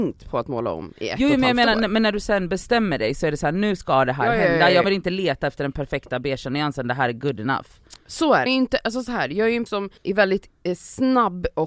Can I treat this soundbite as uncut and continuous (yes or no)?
no